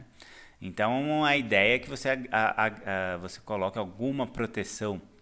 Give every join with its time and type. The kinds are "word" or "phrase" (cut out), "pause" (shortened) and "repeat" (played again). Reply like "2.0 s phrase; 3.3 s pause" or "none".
none